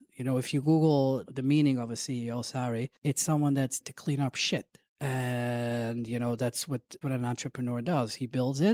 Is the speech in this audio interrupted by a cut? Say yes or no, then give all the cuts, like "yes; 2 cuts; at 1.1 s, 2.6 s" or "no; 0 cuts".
yes; 5 cuts; at 1.2 s, 3.0 s, 3.8 s, 4.9 s, 7.0 s